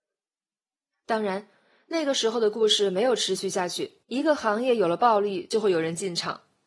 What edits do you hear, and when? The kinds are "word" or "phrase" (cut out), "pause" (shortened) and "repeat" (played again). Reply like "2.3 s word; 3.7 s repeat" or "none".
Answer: 4.0 s pause